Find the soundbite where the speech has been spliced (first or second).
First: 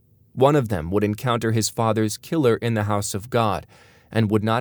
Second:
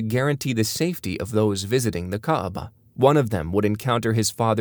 second